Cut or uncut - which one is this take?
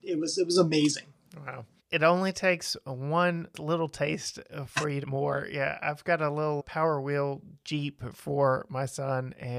cut